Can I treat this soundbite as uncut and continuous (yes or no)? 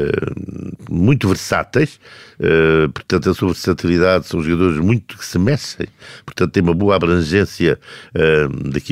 yes